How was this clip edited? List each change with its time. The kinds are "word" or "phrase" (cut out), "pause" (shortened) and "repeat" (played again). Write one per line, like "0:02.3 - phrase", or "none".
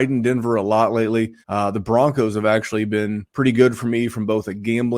0:01.4 - pause
0:03.3 - pause